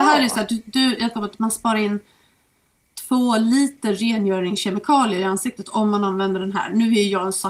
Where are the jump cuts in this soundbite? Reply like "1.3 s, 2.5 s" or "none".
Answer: 1.1 s